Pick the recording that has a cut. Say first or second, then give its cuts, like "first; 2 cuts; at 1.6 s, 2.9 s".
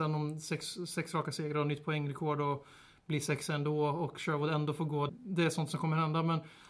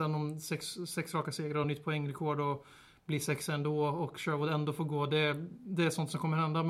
first; 1 cut; at 5.1 s